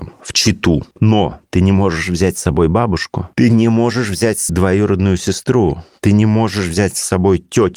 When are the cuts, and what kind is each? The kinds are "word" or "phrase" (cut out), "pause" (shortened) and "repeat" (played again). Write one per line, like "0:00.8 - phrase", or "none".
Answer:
0:00.9 - pause
0:03.3 - pause
0:04.5 - word